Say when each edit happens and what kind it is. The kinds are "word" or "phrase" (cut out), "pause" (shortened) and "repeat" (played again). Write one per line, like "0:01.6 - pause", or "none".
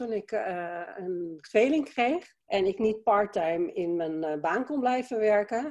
0:02.4 - pause